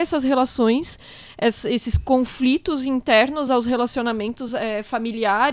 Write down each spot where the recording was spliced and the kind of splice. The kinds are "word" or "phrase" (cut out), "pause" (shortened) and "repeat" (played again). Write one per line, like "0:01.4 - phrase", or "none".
none

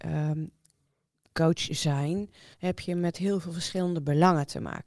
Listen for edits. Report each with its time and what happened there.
0:02.5 - pause

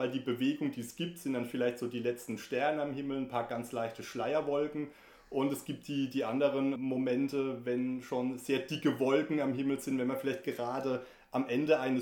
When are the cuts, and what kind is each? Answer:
none

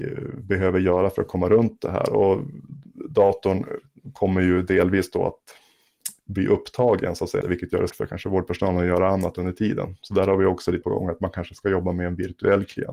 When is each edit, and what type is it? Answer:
0:06.2 - pause
0:07.4 - phrase
0:07.9 - word
0:10.8 - word

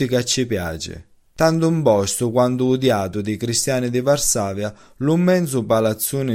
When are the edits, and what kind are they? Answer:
none

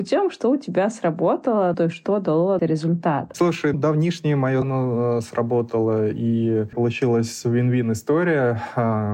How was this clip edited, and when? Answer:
0:01.7 - word
0:02.6 - phrase
0:03.7 - word
0:04.6 - word
0:06.7 - phrase

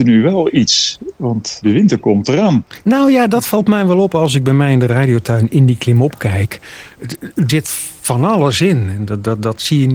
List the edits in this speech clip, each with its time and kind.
0:07.5 - word

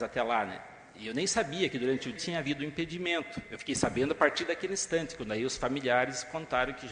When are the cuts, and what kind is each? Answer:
0:02.2 - word

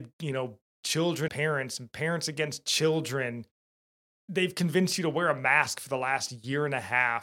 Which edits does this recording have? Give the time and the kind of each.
0:01.3 - word
0:04.0 - pause

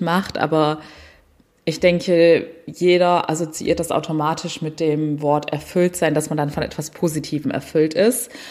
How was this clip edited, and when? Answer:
none

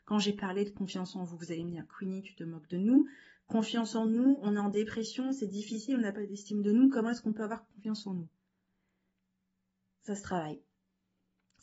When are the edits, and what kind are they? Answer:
none

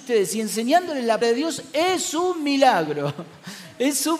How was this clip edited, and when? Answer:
0:01.2 - word

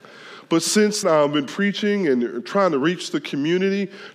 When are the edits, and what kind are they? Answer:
0:01.0 - word

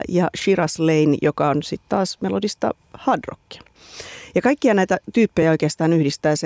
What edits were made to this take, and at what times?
none

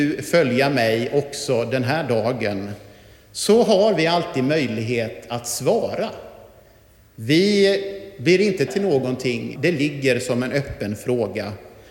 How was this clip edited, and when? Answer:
0:08.7 - word
0:09.6 - word

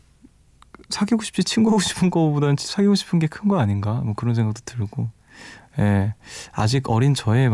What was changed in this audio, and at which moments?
none

